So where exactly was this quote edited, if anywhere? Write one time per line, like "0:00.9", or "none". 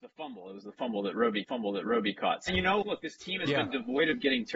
0:01.4
0:02.5
0:02.8